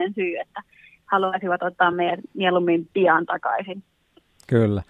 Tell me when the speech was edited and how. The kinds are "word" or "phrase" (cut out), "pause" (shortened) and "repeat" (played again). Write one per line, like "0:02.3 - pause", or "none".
none